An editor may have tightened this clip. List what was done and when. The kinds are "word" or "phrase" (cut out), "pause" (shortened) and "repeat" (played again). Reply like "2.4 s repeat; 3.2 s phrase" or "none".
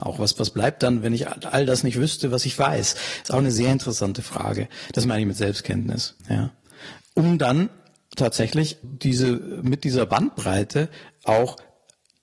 6.2 s pause; 8.8 s word